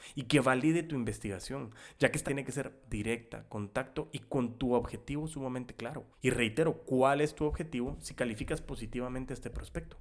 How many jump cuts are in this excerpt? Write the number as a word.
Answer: three